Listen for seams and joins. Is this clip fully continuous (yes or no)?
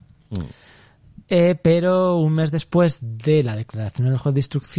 no